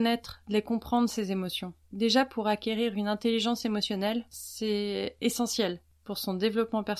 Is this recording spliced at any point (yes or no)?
yes